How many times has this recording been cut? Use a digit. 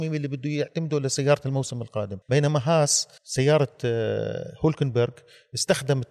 2